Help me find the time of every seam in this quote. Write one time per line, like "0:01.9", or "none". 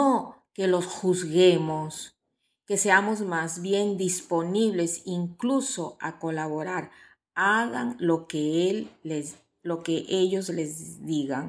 none